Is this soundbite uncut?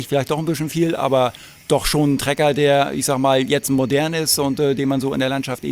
yes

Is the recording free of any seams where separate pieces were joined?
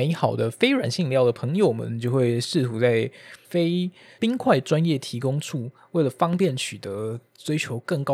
yes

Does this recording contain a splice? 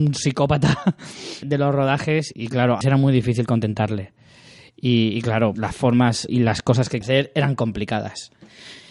yes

